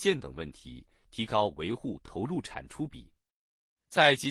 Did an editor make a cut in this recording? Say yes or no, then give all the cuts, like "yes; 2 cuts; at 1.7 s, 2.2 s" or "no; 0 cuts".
no; 0 cuts